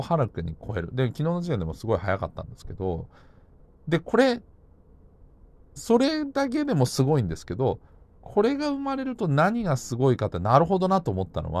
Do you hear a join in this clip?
no; 0 cuts

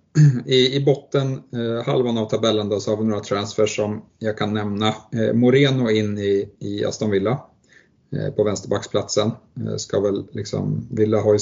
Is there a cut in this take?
no; 0 cuts

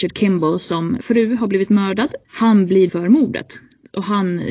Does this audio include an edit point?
yes; 3 cuts; at 1.0 s, 2.2 s, 2.9 s

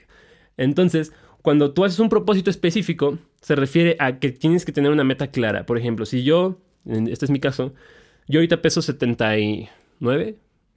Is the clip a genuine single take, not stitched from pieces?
yes; 0 cuts

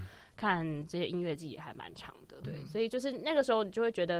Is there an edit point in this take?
yes; 1 cut; at 2.4 s

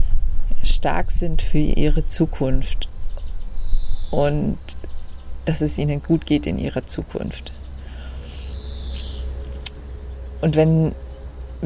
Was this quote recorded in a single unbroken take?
yes; 0 cuts

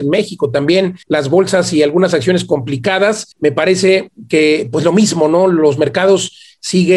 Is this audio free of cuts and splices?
no; 2 cuts; at 1.0 s, 3.3 s

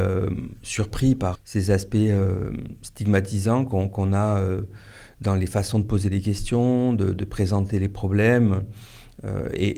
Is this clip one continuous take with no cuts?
no; 1 cut; at 1.3 s

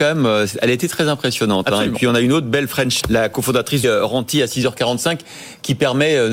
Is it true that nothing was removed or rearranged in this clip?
no; 2 cuts; at 3.0 s, 3.8 s

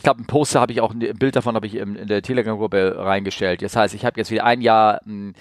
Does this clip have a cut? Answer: no; 0 cuts

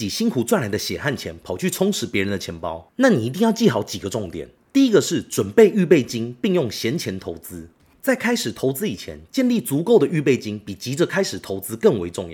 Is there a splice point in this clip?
no; 0 cuts

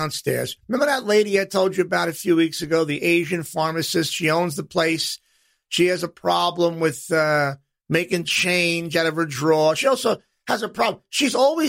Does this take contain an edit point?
no; 0 cuts

